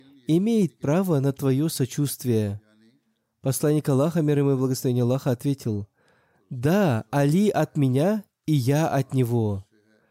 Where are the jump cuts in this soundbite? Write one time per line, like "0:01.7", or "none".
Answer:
none